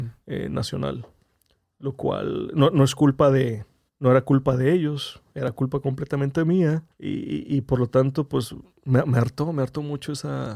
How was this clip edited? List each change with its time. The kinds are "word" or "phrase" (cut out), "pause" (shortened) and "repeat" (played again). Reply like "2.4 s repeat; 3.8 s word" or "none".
3.9 s pause; 6.9 s pause